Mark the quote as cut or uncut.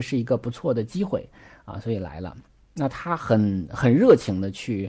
uncut